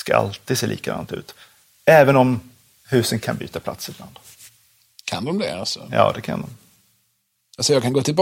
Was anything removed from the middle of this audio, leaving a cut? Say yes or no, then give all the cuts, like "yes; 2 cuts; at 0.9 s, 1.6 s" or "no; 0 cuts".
no; 0 cuts